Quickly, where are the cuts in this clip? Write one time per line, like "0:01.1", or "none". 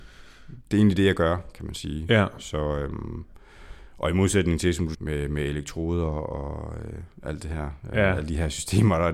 0:04.9